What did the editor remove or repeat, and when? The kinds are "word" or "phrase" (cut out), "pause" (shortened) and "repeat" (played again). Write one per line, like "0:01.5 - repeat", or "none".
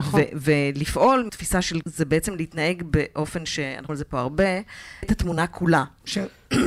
0:01.3 - word
0:01.8 - word
0:03.9 - word
0:05.0 - word

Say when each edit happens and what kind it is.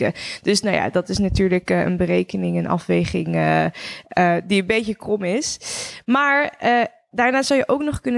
none

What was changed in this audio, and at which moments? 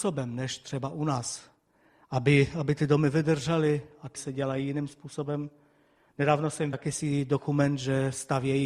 0:04.2 - word
0:06.7 - word

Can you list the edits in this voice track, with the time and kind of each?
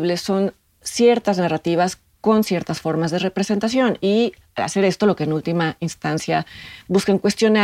none

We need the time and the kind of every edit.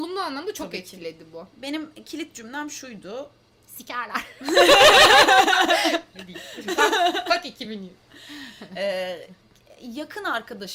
none

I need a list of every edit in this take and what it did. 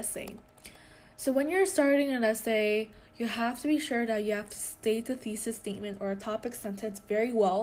none

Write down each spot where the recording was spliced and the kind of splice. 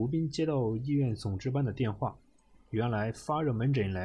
none

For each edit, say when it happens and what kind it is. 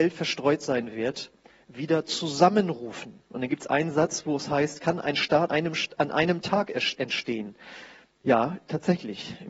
0:05.5 - word

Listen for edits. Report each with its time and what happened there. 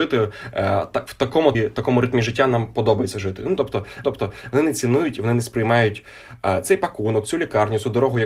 0:01.5 - word
0:04.0 - repeat

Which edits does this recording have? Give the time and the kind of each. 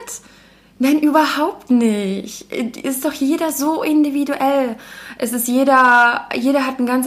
none

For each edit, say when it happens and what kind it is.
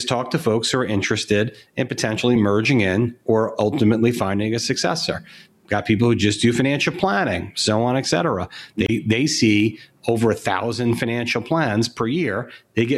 none

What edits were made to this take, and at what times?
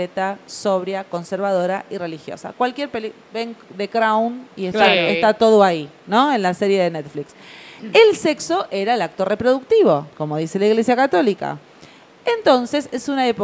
0:10.1 - pause

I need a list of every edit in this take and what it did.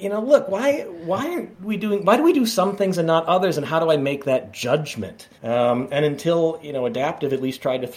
0:01.5 - pause
0:05.3 - pause

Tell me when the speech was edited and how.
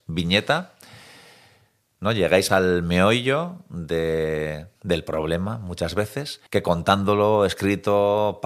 0:02.5 - word
0:04.8 - pause
0:06.5 - pause

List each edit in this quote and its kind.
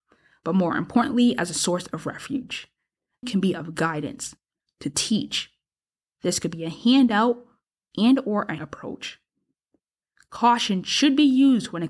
0:03.2 - phrase
0:08.6 - word

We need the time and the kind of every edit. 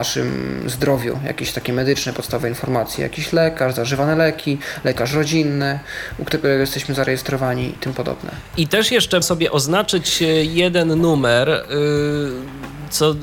0:07.8 - word
0:09.2 - phrase

